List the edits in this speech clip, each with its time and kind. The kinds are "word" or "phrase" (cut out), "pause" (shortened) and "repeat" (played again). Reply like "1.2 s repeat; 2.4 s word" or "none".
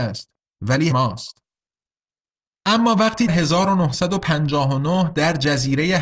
0.9 s word; 3.3 s word